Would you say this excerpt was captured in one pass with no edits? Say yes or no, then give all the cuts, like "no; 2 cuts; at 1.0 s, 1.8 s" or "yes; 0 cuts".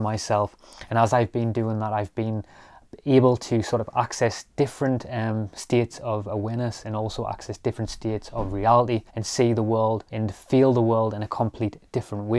no; 2 cuts; at 9.1 s, 10.1 s